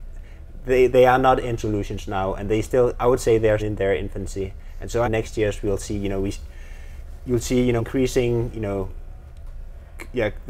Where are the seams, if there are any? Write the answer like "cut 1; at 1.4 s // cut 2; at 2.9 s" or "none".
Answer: cut 1; at 1.6 s // cut 2; at 3.6 s // cut 3; at 5.0 s // cut 4; at 7.8 s